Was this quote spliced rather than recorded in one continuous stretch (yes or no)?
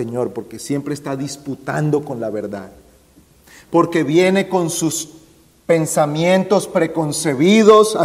no